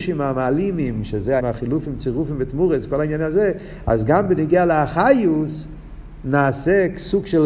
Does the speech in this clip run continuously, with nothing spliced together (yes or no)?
no